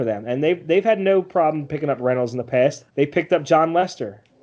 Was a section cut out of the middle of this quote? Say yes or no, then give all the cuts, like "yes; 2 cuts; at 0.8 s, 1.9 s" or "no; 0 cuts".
yes; 1 cut; at 2.9 s